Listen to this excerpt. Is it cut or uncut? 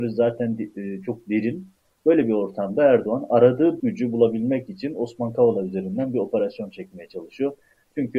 cut